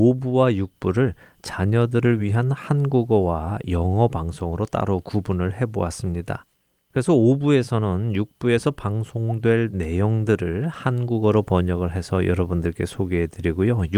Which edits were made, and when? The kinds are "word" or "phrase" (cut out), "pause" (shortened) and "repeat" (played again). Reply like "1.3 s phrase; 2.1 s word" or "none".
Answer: none